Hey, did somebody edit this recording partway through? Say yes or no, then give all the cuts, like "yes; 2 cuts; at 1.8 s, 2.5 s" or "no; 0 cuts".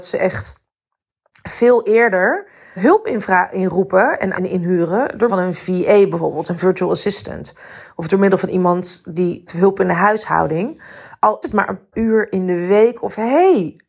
yes; 6 cuts; at 2.8 s, 4.3 s, 5.3 s, 9.5 s, 11.4 s, 11.9 s